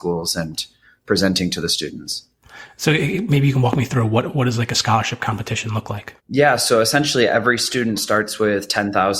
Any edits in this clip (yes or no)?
yes